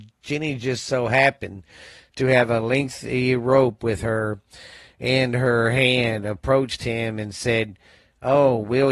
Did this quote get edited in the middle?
no; 0 cuts

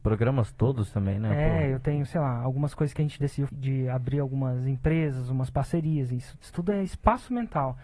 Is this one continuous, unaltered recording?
no; 2 cuts; at 3.5 s, 6.4 s

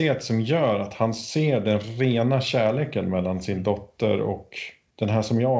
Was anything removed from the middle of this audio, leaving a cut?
no; 0 cuts

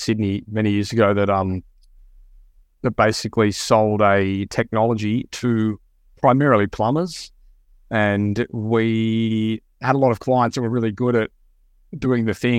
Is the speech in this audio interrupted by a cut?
no; 0 cuts

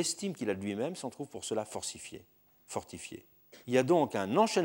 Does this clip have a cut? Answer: yes; 1 cut; at 3.6 s

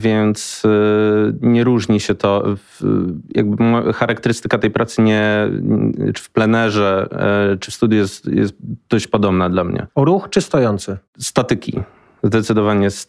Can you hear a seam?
yes; 2 cuts; at 9.9 s, 11.1 s

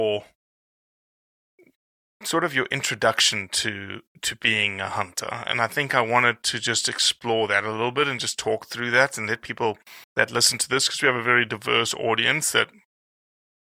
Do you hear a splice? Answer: yes; 1 cut; at 10.0 s

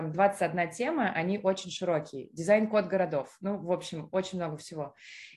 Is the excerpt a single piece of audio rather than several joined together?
yes; 0 cuts

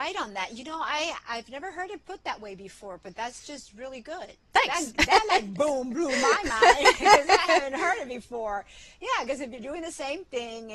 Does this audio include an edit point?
yes; 2 cuts; at 4.4 s, 5.0 s

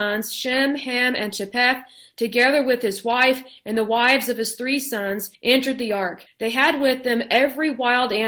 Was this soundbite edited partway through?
yes; 2 cuts; at 5.3 s, 6.3 s

